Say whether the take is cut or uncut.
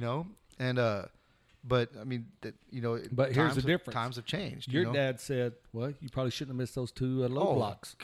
uncut